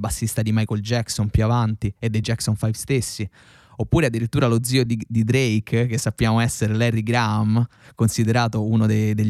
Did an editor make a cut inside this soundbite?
no; 0 cuts

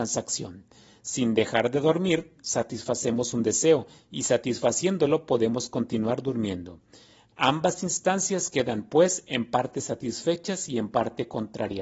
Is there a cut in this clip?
no; 0 cuts

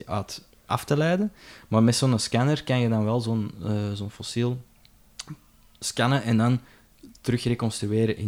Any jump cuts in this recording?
no; 0 cuts

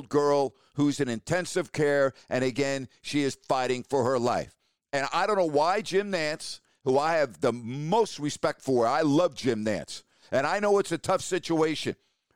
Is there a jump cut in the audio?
no; 0 cuts

